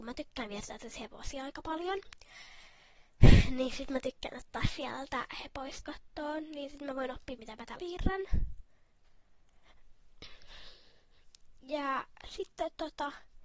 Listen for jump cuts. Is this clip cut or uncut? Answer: cut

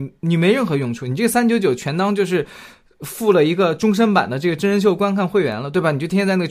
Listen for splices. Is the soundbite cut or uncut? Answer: uncut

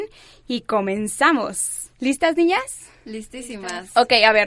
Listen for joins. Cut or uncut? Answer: cut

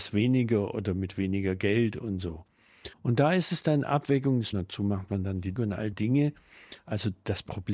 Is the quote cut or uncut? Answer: cut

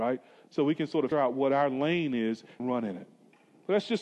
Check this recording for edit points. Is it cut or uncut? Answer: cut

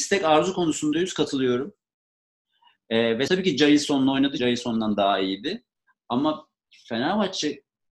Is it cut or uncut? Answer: cut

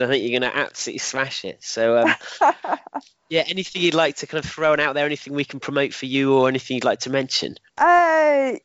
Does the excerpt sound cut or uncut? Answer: cut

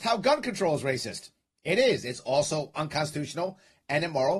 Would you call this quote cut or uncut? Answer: uncut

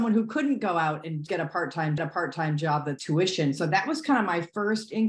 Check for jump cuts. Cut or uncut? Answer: cut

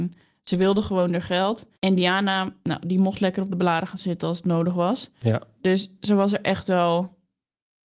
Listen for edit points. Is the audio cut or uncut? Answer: cut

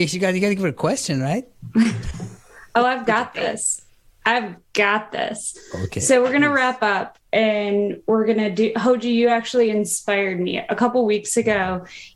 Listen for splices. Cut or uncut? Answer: uncut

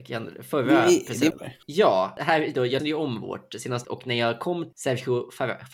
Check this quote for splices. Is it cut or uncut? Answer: cut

